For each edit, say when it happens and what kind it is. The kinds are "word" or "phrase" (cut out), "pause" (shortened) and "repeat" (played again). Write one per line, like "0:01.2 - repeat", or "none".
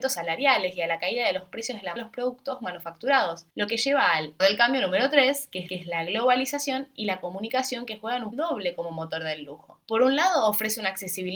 0:02.0 - word
0:03.5 - pause
0:04.4 - word
0:05.7 - repeat
0:08.3 - word
0:09.8 - pause